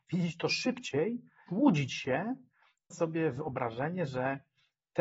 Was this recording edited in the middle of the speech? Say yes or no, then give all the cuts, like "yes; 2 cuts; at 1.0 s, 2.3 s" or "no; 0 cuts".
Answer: yes; 2 cuts; at 1.5 s, 2.9 s